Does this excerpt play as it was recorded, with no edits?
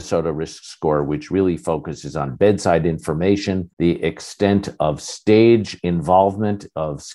no; 1 cut; at 3.7 s

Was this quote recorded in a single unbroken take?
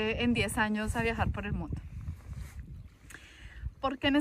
yes; 0 cuts

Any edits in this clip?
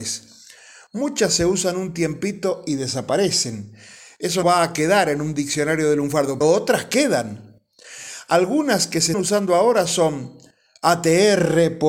yes; 3 cuts; at 4.4 s, 6.4 s, 9.1 s

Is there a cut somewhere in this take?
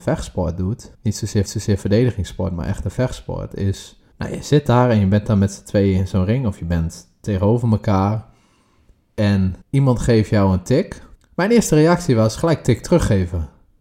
yes; 5 cuts; at 0.9 s, 1.5 s, 4.1 s, 9.6 s, 11.2 s

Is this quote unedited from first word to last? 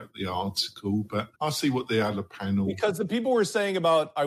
no; 1 cut; at 1.3 s

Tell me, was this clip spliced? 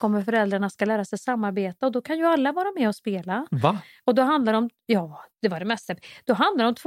no; 0 cuts

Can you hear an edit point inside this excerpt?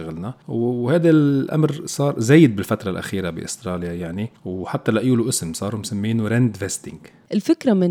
no; 0 cuts

